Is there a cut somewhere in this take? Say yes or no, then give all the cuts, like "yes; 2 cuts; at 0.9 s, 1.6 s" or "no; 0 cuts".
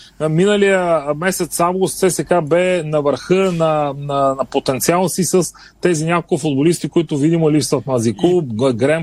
no; 0 cuts